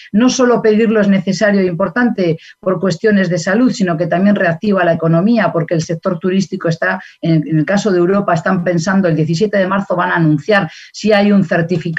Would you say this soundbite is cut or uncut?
uncut